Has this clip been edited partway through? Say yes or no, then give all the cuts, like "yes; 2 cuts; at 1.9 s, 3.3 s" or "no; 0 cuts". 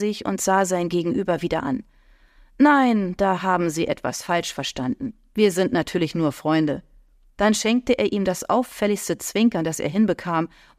no; 0 cuts